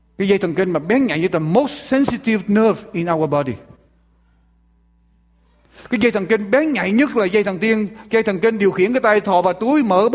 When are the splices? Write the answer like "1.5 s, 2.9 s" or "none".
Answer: none